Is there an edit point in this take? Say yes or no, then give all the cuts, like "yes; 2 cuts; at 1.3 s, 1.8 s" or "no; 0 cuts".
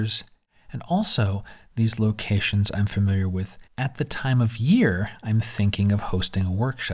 yes; 1 cut; at 3.7 s